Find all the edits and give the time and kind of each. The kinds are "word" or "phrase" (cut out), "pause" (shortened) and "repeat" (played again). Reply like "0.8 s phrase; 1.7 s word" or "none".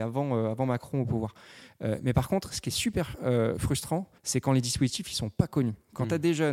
4.2 s pause